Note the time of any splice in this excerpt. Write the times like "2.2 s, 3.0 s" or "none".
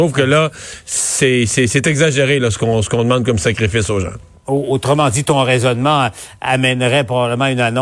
4.3 s